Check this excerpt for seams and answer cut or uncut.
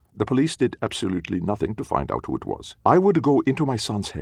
cut